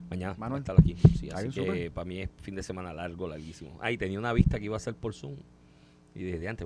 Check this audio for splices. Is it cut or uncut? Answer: uncut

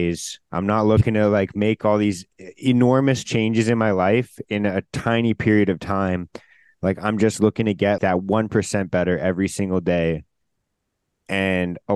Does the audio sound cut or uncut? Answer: cut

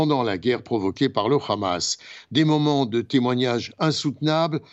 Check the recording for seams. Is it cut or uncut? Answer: uncut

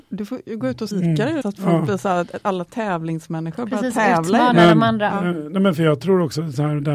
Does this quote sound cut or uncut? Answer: cut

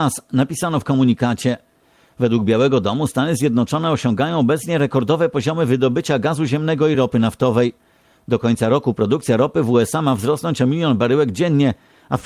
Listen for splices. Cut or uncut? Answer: uncut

